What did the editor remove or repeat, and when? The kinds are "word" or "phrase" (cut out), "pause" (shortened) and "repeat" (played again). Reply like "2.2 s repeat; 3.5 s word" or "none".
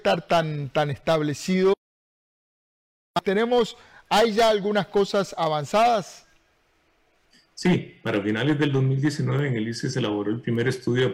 none